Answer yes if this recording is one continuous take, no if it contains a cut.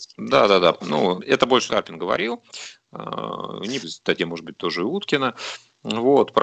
no